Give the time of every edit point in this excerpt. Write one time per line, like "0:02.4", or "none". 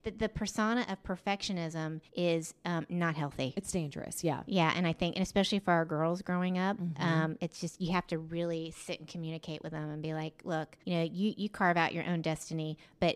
0:02.1
0:10.8

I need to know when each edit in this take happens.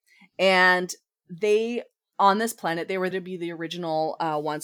0:03.1

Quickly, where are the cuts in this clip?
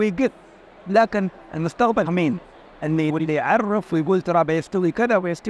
0:02.1
0:03.1

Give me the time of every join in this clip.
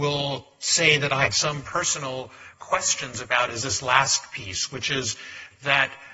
0:01.3
0:02.5

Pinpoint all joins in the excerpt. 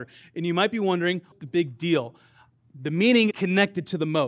0:01.3
0:03.3

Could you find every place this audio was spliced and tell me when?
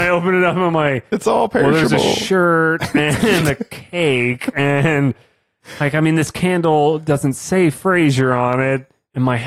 none

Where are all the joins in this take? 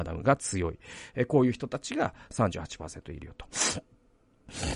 none

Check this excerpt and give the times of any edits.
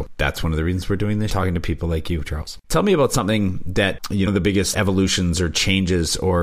0:01.3
0:02.6
0:04.3
0:04.7

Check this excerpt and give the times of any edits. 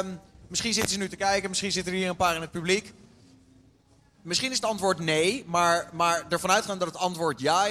none

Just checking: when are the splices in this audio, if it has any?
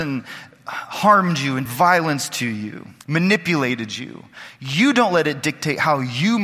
0:01.7
0:03.0

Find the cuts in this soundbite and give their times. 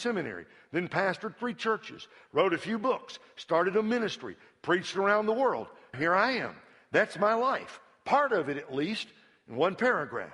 0:05.9

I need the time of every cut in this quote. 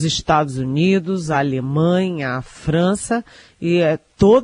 none

